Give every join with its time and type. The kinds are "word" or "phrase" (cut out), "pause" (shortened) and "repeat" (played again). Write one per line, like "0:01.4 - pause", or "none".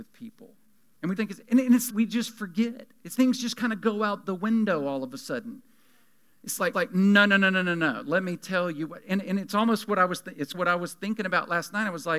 0:01.2 - word
0:01.9 - word
0:03.1 - word
0:06.7 - repeat
0:10.5 - word